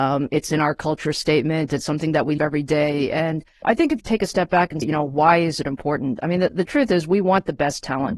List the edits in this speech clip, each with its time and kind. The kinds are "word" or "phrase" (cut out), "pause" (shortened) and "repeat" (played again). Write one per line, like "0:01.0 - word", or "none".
0:02.4 - word
0:03.6 - word
0:04.0 - word
0:04.8 - word